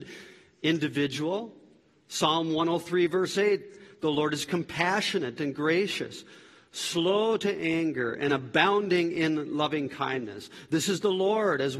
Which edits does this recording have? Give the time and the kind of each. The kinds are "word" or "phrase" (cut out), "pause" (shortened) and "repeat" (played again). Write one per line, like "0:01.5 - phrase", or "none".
none